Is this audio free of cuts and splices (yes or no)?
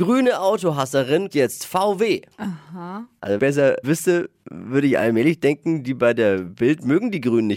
no